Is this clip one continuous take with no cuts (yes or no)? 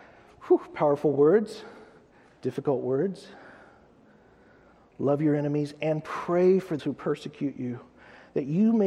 no